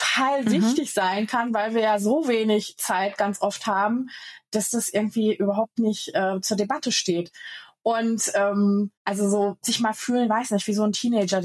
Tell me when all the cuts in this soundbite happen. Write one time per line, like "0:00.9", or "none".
0:09.0